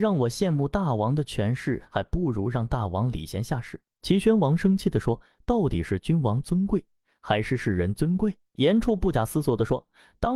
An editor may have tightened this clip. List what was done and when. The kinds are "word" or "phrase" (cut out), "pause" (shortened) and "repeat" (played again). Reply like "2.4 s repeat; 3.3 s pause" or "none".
none

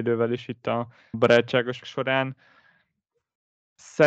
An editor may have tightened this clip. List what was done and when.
1.1 s word; 1.8 s word

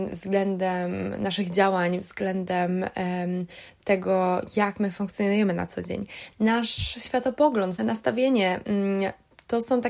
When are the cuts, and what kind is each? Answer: 7.8 s word

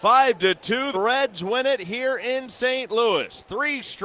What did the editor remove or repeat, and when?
0.9 s word

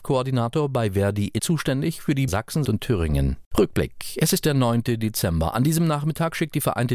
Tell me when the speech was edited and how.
1.4 s word; 2.3 s word; 2.6 s word; 3.5 s pause

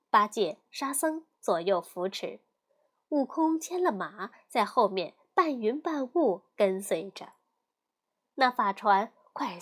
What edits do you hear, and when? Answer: none

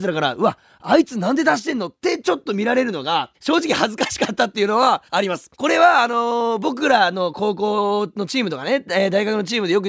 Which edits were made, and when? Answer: 3.3 s pause; 5.1 s pause; 5.5 s pause

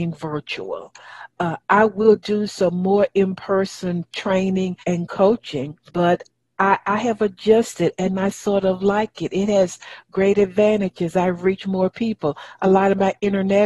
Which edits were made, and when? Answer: 4.8 s pause; 5.9 s pause

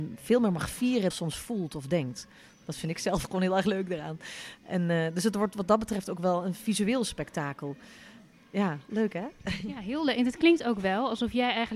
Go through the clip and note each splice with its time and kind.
1.1 s phrase

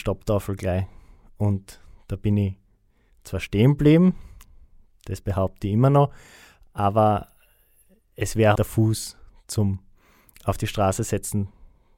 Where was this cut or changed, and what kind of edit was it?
8.6 s word

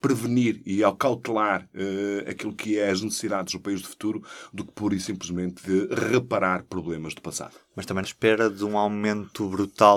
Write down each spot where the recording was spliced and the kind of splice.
8.0 s phrase

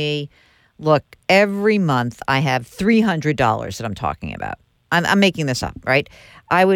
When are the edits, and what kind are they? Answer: none

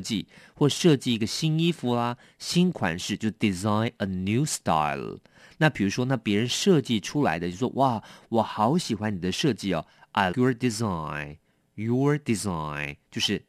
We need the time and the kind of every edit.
10.3 s word

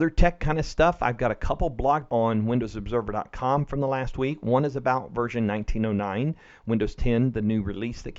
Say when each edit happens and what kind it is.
2.1 s word

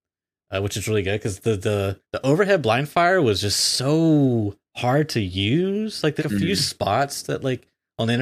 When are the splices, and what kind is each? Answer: 2.0 s pause; 6.2 s phrase

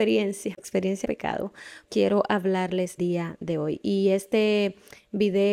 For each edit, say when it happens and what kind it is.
1.0 s word; 1.9 s word; 3.0 s word

